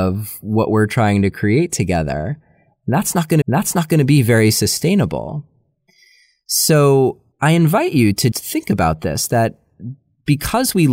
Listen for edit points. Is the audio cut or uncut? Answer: cut